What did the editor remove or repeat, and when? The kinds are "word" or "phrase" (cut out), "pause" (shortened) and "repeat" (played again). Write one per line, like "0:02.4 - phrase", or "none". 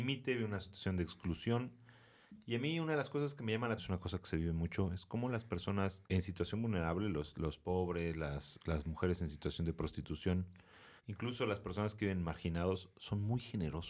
0:03.8 - phrase
0:06.1 - pause
0:11.0 - pause